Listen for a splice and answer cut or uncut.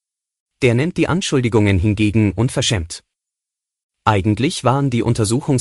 uncut